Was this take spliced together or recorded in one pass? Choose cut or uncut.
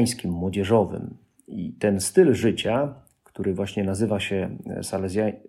uncut